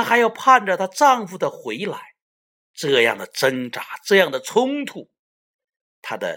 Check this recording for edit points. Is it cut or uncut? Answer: cut